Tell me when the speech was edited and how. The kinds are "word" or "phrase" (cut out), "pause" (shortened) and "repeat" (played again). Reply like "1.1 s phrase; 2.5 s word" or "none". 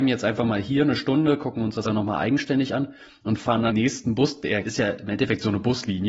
1.9 s phrase; 3.7 s phrase; 4.6 s word